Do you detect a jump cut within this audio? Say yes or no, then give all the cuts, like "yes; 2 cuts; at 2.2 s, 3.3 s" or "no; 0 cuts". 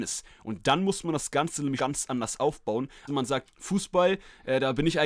yes; 3 cuts; at 1.8 s, 3.1 s, 3.5 s